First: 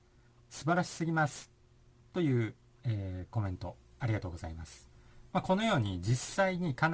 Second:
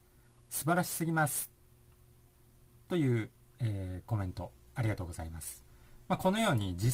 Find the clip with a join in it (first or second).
first